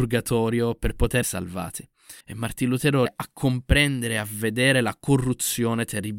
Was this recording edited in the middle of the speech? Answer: yes; 3 cuts; at 1.2 s, 2.2 s, 3.1 s

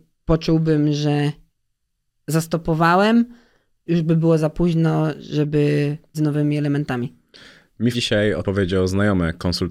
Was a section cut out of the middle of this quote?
yes; 4 cuts; at 3.9 s, 6.1 s, 7.9 s, 8.4 s

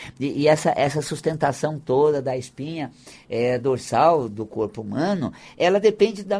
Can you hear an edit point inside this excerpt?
no; 0 cuts

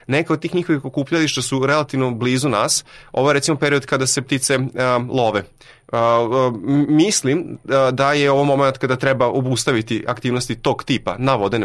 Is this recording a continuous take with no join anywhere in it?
yes; 0 cuts

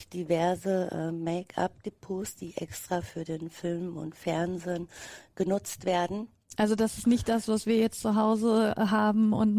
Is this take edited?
no; 0 cuts

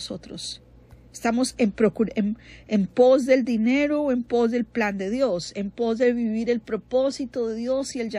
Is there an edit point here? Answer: no; 0 cuts

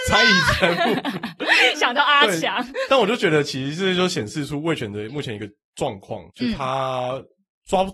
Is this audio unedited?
no; 1 cut; at 6.3 s

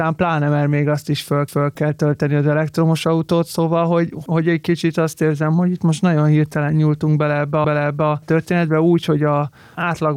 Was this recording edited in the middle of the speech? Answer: yes; 2 cuts; at 1.5 s, 7.6 s

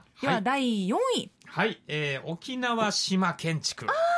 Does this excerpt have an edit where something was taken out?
yes; 1 cut; at 1.4 s

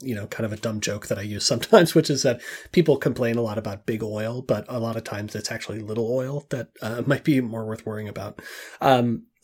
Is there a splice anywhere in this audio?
no; 0 cuts

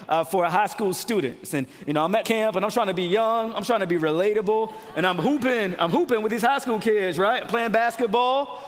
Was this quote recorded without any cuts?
no; 1 cut; at 2.2 s

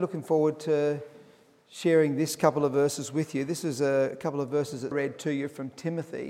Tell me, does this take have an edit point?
yes; 1 cut; at 4.9 s

